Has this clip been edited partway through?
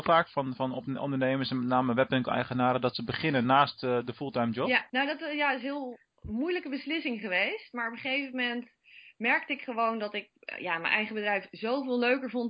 yes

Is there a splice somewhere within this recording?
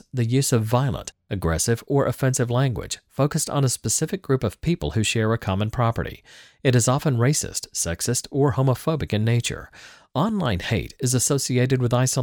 no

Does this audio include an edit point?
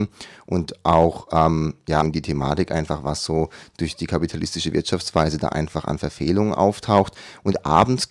yes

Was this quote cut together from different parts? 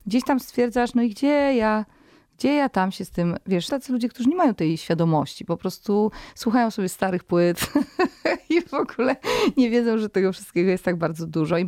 yes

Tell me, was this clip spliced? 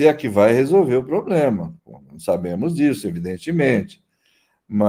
yes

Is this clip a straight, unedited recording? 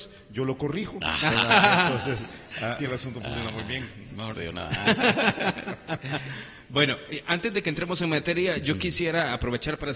no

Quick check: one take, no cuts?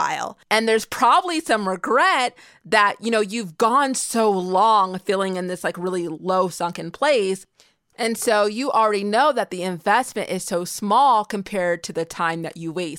yes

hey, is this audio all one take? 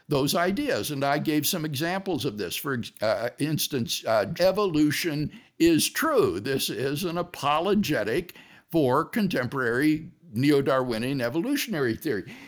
no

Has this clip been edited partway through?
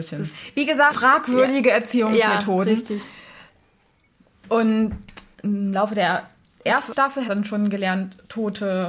yes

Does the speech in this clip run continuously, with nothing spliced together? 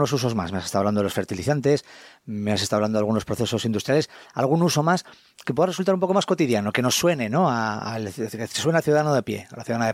yes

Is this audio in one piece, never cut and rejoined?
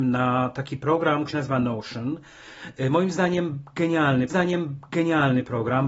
no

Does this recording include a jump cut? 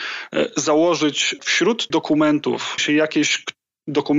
yes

